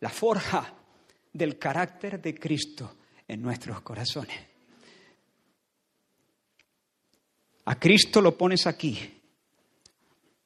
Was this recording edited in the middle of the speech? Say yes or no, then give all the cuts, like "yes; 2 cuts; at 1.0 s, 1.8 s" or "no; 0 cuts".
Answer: no; 0 cuts